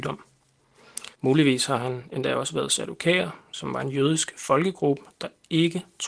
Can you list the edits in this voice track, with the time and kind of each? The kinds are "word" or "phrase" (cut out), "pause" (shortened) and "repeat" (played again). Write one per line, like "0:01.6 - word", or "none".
0:01.1 - pause